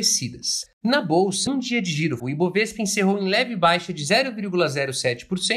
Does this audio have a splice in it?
yes; 2 cuts; at 1.5 s, 2.2 s

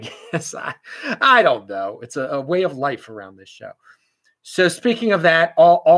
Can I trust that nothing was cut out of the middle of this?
yes; 0 cuts

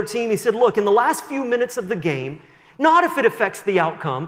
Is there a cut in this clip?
no; 0 cuts

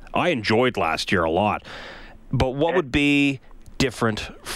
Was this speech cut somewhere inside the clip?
no; 0 cuts

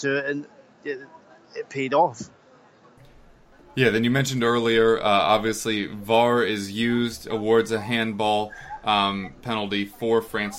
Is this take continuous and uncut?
yes; 0 cuts

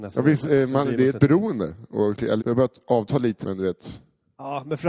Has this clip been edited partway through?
yes; 2 cuts; at 2.4 s, 3.4 s

